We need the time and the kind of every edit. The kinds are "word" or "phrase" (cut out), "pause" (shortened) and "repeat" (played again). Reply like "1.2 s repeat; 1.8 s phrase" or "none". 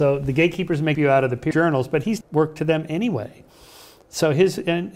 0.9 s word; 1.5 s word; 2.2 s phrase